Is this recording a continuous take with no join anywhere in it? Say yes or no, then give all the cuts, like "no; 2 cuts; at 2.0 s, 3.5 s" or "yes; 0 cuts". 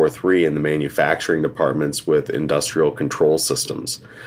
yes; 0 cuts